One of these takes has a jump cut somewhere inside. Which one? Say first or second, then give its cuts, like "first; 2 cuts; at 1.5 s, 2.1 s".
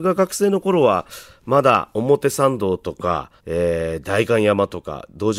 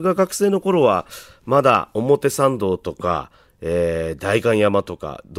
first; 1 cut; at 3.4 s